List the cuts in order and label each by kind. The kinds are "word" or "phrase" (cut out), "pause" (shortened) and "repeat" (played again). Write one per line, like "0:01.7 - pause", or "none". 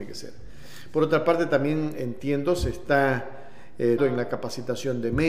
0:04.0 - word